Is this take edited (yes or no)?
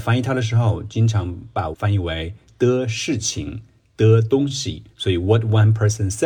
yes